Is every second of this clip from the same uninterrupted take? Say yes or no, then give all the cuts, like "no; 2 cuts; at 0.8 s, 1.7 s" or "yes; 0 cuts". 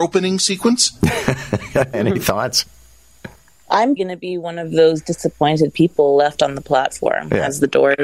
no; 2 cuts; at 1.9 s, 4.0 s